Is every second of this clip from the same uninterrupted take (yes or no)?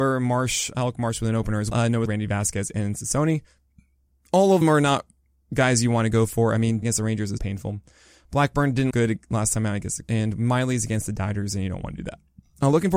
no